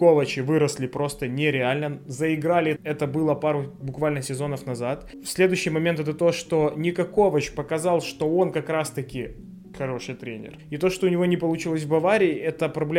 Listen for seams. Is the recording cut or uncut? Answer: cut